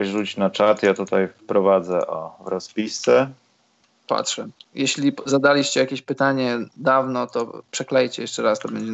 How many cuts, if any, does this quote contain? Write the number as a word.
one